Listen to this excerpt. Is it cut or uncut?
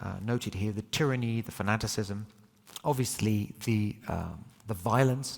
uncut